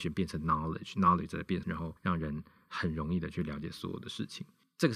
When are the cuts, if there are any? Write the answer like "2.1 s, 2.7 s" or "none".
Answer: 1.6 s

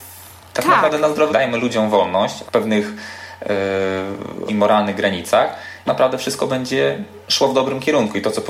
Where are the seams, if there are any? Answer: 1.3 s, 2.5 s, 4.5 s, 5.9 s, 7.2 s

